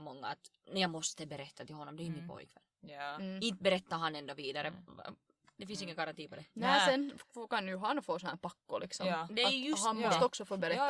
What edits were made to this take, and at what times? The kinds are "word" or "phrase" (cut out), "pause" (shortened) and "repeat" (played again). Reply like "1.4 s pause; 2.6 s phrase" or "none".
none